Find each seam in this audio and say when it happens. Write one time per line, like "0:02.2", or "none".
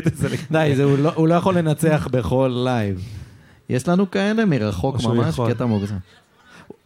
none